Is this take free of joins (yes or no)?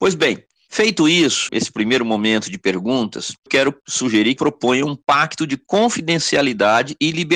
no